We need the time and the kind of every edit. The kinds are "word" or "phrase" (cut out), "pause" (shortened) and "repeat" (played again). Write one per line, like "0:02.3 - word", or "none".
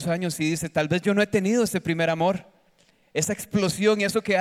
none